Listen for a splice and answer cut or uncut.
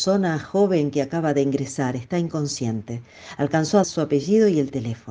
cut